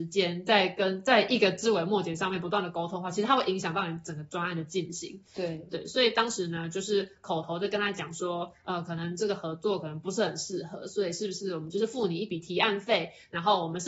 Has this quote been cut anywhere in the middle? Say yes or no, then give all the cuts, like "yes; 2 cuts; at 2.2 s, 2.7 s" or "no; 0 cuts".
no; 0 cuts